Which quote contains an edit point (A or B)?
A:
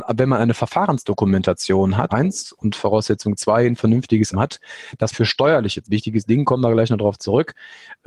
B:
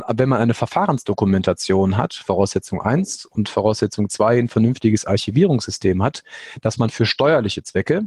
A